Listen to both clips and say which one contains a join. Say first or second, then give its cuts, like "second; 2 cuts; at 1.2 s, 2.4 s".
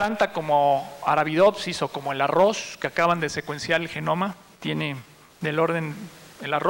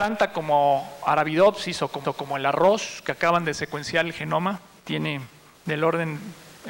second; 1 cut; at 2.0 s